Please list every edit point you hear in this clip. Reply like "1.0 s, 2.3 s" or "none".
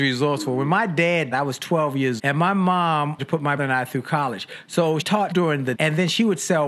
1.3 s, 2.2 s, 3.2 s, 3.6 s, 5.0 s, 5.3 s, 5.7 s